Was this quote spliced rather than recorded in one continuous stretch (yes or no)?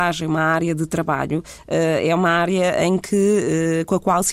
no